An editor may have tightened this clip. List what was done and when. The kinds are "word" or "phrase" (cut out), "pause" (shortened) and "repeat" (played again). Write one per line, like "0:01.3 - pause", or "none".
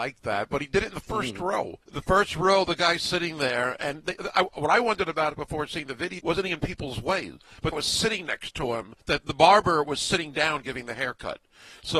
0:01.8 - pause
0:06.2 - word
0:07.7 - phrase